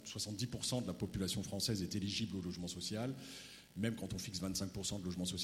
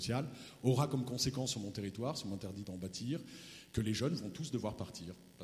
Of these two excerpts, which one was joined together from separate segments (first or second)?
second